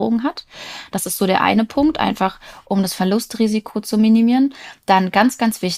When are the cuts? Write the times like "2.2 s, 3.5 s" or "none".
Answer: none